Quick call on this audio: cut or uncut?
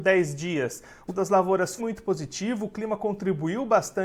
cut